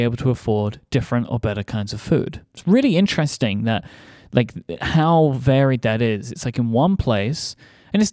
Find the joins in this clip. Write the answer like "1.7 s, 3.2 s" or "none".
none